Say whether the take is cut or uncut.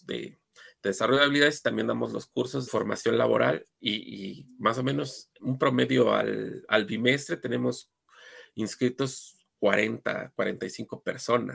cut